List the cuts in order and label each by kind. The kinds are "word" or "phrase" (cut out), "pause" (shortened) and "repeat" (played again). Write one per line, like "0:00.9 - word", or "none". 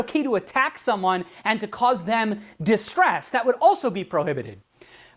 none